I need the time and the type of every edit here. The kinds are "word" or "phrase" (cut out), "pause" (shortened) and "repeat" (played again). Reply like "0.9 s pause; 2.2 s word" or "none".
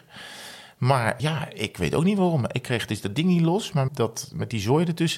1.2 s word; 3.9 s word